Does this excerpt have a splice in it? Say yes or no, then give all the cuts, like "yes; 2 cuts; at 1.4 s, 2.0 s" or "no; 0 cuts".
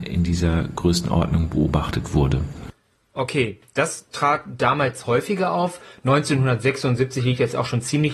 no; 0 cuts